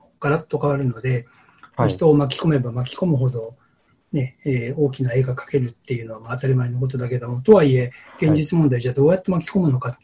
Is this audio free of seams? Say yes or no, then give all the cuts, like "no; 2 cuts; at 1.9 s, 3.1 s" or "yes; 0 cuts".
yes; 0 cuts